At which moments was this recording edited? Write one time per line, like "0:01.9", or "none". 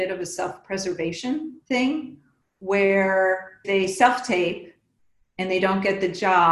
0:01.6
0:03.6